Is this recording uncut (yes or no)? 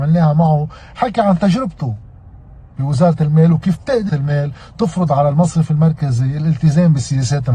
no